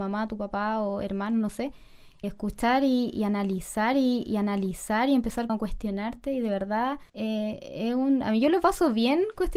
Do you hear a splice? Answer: yes; 4 cuts; at 2.2 s, 3.9 s, 5.5 s, 7.1 s

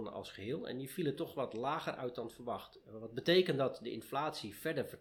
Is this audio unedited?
yes; 0 cuts

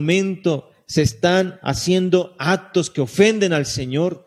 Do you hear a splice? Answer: no; 0 cuts

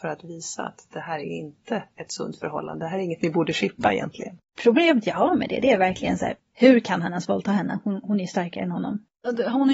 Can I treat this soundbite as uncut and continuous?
yes; 0 cuts

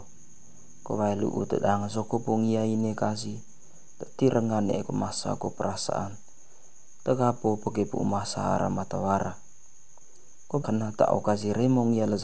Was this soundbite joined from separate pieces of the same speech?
yes; 1 cut; at 10.6 s

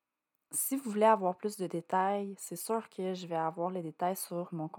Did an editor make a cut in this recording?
no; 0 cuts

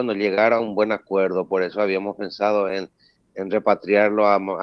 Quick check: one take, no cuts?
yes; 0 cuts

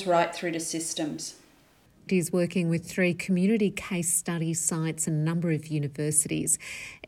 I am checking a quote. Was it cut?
yes; 1 cut; at 2.1 s

